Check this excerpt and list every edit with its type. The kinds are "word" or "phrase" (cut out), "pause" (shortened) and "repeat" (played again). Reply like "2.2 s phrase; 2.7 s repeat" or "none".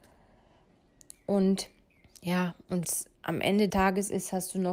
1.9 s pause; 2.8 s word; 3.1 s pause; 3.7 s word